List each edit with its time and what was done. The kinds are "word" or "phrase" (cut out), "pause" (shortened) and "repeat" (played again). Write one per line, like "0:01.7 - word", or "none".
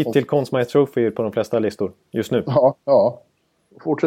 0:02.8 - pause